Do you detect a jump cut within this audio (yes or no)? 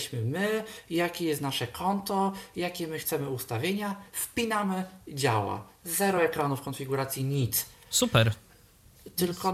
no